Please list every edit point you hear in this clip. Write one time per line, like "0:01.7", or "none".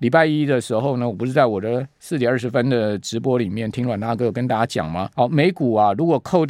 0:05.1

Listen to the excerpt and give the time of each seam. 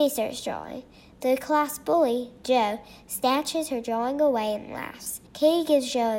0:05.3

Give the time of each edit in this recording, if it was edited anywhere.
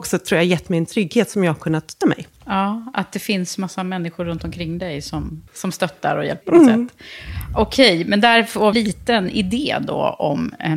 0:02.0
0:05.5
0:06.4
0:08.7

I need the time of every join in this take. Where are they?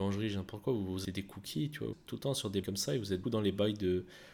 0:01.0
0:01.9
0:02.6
0:03.2

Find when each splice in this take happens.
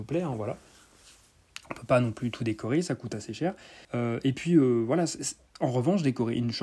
0:03.8

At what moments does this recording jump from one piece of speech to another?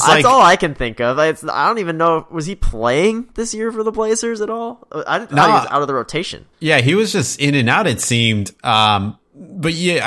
0:06.5

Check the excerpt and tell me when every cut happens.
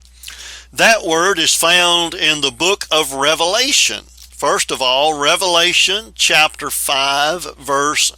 0:04.3

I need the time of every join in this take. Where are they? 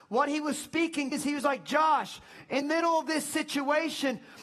0:01.1
0:02.6

